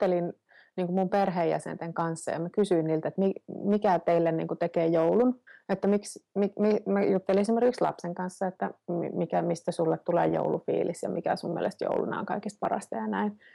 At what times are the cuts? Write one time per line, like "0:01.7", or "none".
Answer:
0:05.5